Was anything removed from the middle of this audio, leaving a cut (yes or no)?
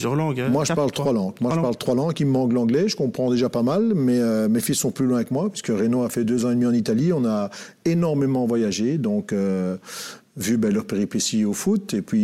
no